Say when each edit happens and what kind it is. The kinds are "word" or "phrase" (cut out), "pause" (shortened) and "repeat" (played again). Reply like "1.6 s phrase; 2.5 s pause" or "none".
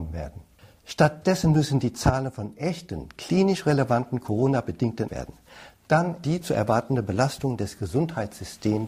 5.1 s phrase; 6.2 s phrase